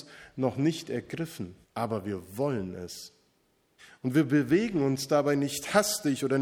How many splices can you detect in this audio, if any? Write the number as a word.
two